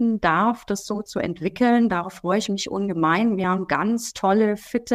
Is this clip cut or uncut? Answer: uncut